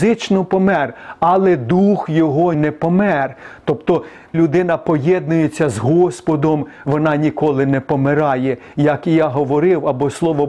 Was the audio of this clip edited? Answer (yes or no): yes